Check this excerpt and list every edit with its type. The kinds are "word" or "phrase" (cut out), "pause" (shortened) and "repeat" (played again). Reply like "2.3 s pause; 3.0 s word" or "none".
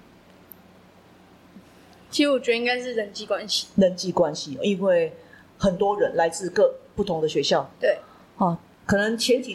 none